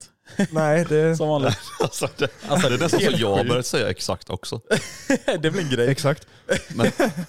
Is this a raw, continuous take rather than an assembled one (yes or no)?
yes